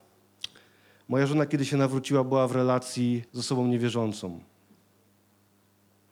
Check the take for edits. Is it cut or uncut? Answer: cut